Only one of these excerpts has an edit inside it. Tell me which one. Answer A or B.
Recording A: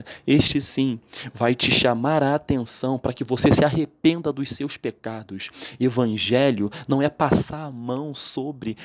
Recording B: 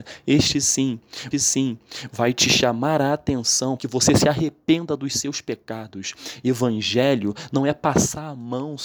B